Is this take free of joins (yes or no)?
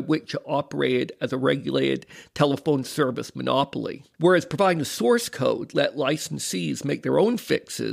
no